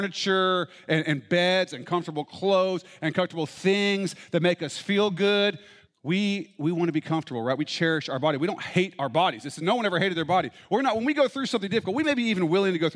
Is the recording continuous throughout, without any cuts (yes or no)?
yes